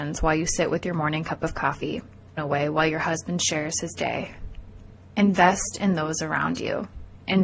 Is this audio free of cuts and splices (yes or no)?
no